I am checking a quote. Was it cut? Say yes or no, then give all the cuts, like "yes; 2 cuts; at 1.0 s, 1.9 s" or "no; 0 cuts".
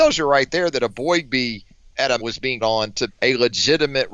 yes; 3 cuts; at 2.2 s, 2.6 s, 3.1 s